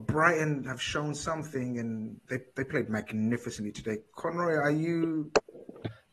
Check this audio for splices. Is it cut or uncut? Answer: cut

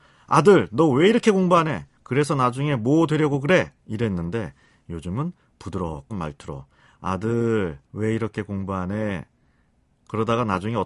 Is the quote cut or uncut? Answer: cut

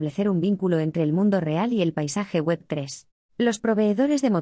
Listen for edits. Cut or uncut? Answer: cut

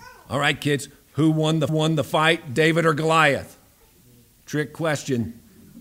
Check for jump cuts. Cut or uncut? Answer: cut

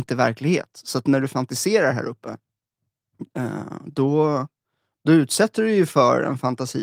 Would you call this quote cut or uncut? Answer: uncut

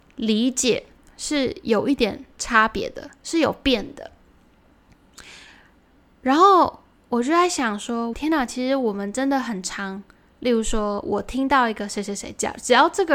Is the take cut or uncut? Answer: cut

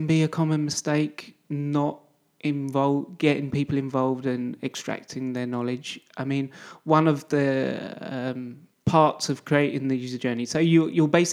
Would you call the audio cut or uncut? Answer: uncut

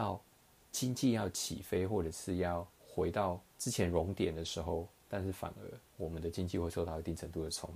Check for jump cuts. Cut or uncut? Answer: cut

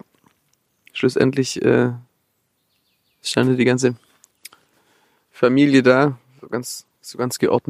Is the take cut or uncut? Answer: uncut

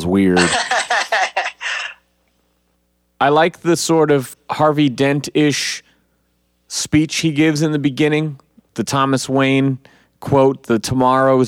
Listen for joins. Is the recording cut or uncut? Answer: uncut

